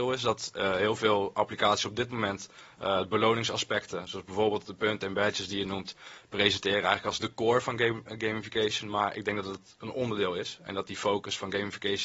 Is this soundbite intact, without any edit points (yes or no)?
yes